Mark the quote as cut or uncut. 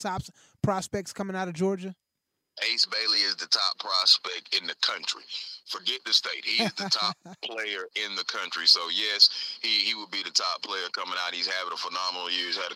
uncut